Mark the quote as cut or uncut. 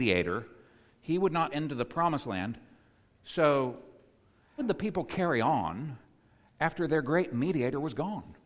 cut